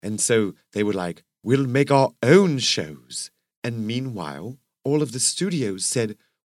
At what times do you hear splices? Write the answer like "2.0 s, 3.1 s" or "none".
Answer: none